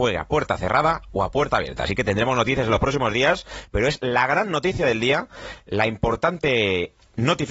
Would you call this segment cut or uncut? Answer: uncut